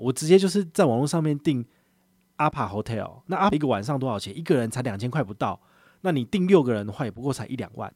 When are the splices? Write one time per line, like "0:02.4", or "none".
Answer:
0:03.5